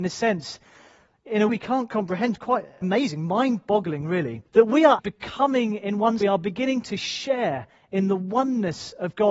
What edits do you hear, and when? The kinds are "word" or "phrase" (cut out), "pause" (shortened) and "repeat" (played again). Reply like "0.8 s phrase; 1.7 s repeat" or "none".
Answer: 1.5 s word; 2.8 s word; 4.5 s pause; 5.0 s word; 6.2 s phrase